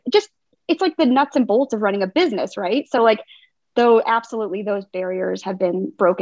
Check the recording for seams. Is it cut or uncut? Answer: uncut